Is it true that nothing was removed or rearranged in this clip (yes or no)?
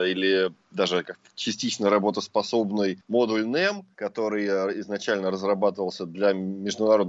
yes